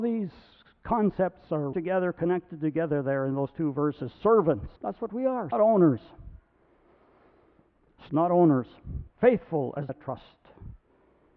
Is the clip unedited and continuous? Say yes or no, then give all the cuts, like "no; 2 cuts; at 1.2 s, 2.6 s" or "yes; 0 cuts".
no; 6 cuts; at 1.7 s, 4.8 s, 5.5 s, 8.1 s, 9.1 s, 9.9 s